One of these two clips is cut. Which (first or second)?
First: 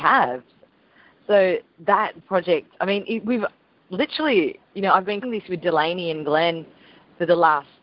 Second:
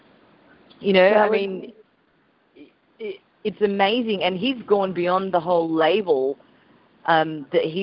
first